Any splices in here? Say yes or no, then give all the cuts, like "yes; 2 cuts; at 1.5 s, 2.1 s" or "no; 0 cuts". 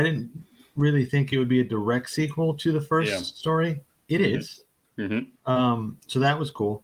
no; 0 cuts